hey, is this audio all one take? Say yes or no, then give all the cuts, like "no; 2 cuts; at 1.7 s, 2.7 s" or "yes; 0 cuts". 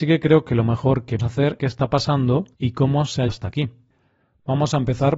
no; 4 cuts; at 1.2 s, 1.6 s, 2.5 s, 3.3 s